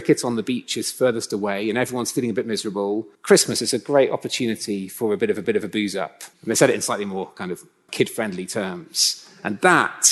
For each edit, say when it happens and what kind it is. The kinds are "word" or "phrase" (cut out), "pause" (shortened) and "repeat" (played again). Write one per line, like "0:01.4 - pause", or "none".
0:03.1 - pause
0:05.4 - repeat
0:06.3 - pause
0:07.9 - word